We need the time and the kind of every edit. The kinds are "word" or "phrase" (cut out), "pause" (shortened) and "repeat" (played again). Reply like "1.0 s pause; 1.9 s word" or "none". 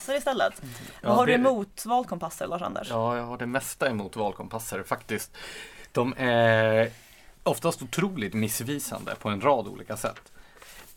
7.3 s pause